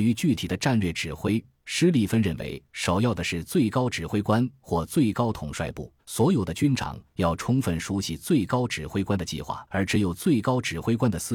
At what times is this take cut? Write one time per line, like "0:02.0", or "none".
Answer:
0:06.0
0:09.7